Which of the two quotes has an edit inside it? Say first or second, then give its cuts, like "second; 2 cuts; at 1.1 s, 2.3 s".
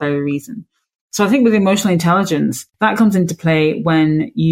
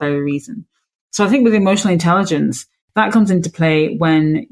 first; 1 cut; at 2.7 s